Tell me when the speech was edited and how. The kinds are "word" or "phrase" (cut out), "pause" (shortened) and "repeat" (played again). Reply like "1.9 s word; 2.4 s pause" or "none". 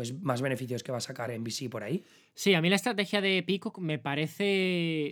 none